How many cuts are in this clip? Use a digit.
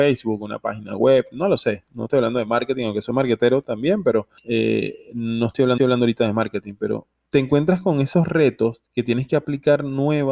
3